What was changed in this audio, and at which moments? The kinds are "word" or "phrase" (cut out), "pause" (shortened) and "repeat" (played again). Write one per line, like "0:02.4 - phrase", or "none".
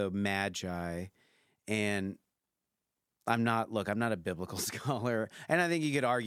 none